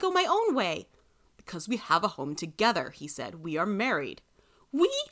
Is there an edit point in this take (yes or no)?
no